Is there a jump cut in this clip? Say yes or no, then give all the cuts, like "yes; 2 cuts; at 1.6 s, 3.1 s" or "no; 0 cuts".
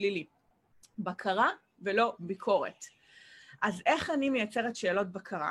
no; 0 cuts